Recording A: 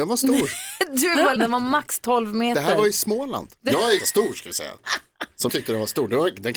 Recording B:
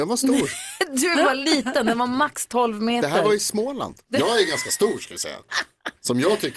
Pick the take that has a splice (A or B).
A